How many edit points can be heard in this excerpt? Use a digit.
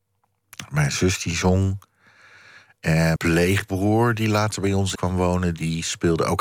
2